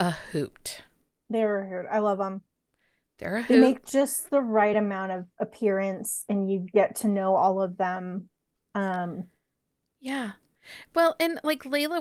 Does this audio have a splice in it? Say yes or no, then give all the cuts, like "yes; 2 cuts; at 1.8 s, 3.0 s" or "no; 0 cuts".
no; 0 cuts